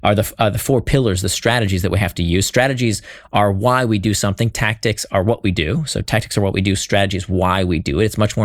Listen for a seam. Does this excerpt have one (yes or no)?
no